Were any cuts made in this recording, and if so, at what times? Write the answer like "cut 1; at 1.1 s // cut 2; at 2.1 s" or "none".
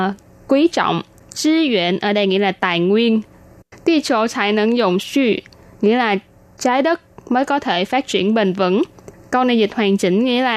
none